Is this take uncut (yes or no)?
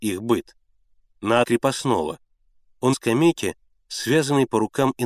no